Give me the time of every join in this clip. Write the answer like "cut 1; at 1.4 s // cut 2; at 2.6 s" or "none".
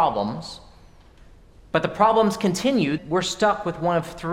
cut 1; at 3.0 s